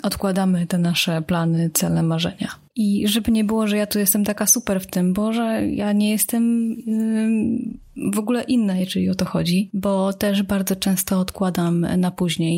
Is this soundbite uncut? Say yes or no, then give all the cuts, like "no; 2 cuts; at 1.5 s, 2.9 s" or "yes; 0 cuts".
yes; 0 cuts